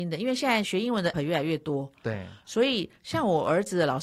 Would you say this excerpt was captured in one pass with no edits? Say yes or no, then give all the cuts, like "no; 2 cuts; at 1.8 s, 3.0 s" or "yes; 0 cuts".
no; 1 cut; at 1.1 s